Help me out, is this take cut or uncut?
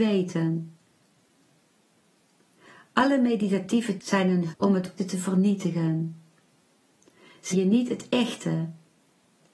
cut